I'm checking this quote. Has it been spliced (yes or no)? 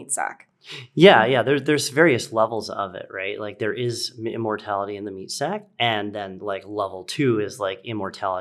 no